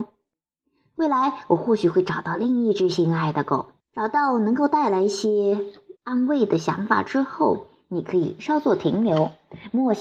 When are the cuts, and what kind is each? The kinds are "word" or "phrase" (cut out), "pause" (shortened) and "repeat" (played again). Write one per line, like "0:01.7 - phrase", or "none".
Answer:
0:03.8 - pause
0:06.0 - pause